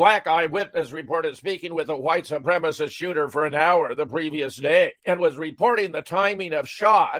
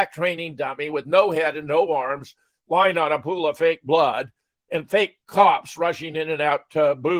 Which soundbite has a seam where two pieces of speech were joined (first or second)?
first